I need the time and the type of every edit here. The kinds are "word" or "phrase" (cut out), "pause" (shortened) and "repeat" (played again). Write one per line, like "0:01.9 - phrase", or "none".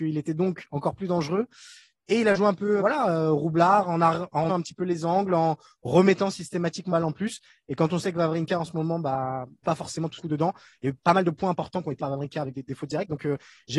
0:02.8 - word
0:04.5 - word
0:06.9 - word
0:09.6 - word
0:10.2 - word
0:12.0 - word